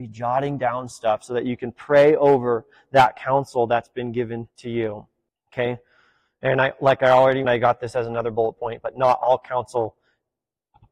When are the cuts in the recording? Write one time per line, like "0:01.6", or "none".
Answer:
0:04.5
0:05.3
0:07.4